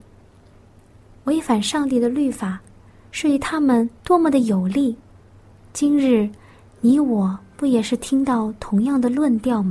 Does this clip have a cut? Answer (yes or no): yes